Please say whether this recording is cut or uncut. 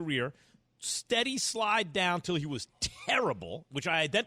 uncut